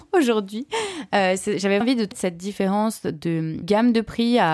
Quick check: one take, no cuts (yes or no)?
no